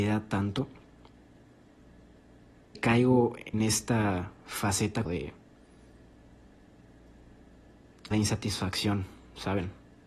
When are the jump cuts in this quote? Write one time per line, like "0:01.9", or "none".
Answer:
0:02.7
0:03.5
0:05.1
0:08.1